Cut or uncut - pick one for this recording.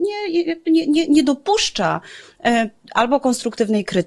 uncut